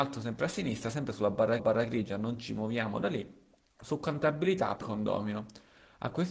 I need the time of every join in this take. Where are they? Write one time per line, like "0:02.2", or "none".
0:01.6
0:04.8